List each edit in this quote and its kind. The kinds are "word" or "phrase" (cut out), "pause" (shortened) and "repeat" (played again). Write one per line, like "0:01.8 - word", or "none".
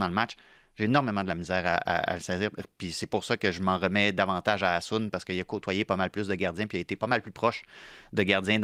none